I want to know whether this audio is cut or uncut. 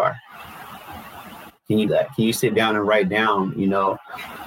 cut